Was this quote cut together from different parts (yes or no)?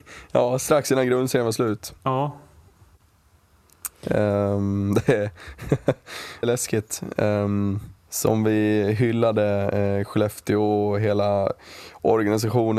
yes